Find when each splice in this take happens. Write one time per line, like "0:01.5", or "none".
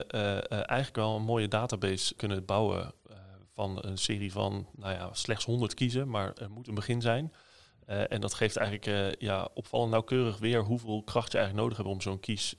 0:02.2